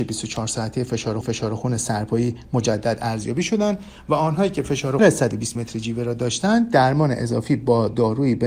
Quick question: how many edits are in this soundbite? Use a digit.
3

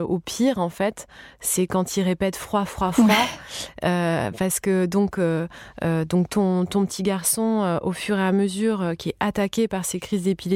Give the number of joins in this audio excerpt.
0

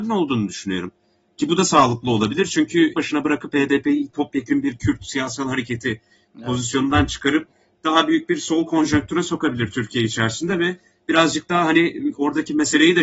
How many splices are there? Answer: 1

